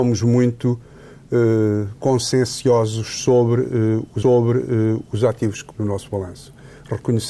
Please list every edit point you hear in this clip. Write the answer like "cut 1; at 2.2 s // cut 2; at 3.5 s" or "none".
cut 1; at 4.2 s // cut 2; at 5.7 s